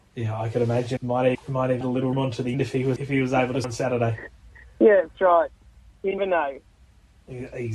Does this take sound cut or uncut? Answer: cut